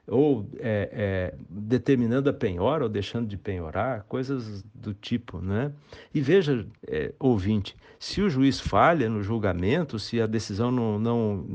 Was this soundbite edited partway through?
yes; 2 cuts; at 1.3 s, 6.8 s

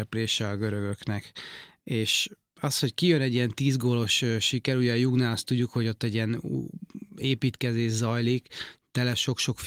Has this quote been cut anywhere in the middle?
no; 0 cuts

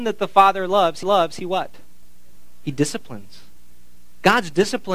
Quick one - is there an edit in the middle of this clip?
yes; 1 cut; at 1.0 s

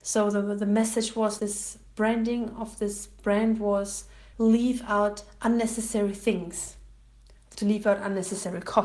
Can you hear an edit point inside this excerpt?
yes; 2 cuts; at 1.4 s, 4.3 s

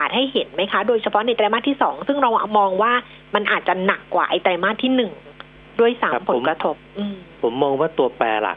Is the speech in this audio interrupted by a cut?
no; 0 cuts

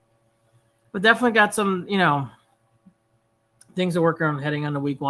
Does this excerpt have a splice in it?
no; 0 cuts

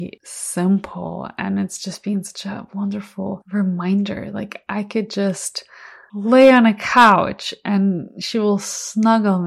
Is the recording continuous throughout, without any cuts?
yes; 0 cuts

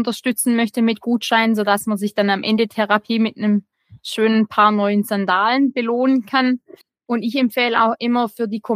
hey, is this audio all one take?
no; 1 cut; at 6.8 s

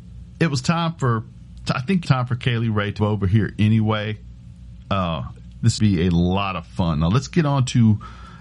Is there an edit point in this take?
yes; 3 cuts; at 2.1 s, 3.0 s, 5.8 s

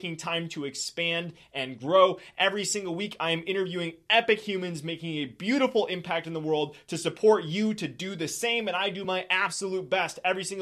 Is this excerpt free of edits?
yes; 0 cuts

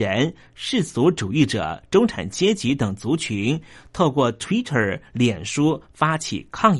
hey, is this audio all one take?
yes; 0 cuts

